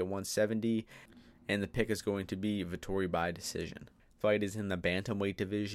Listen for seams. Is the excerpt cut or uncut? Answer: cut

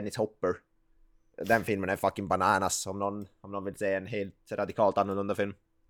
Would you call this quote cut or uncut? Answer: uncut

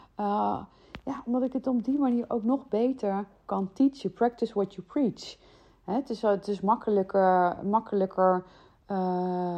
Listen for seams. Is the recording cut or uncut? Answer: uncut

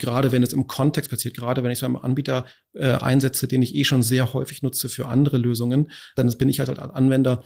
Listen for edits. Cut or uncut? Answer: uncut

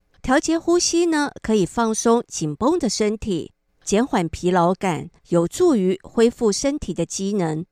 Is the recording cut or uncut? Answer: cut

